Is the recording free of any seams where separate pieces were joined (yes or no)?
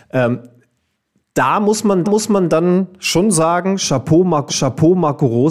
no